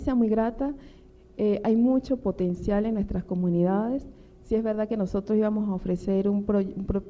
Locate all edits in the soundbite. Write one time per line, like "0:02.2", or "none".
none